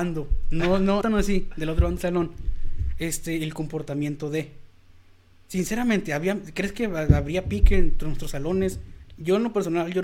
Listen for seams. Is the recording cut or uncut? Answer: cut